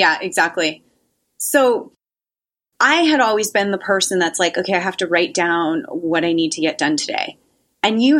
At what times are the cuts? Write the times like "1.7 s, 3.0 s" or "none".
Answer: none